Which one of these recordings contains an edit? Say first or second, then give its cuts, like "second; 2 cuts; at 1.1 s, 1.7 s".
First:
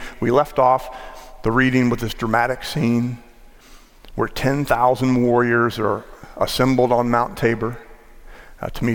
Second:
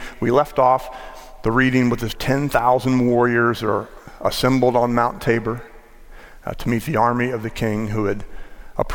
second; 1 cut; at 2.1 s